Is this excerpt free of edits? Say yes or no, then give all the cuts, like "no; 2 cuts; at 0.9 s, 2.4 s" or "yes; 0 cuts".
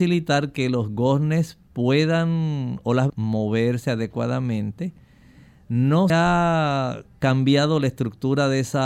no; 2 cuts; at 3.1 s, 6.1 s